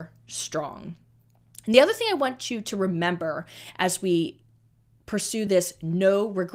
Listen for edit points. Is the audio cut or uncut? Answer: uncut